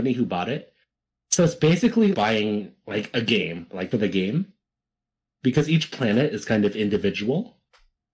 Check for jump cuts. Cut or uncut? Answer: cut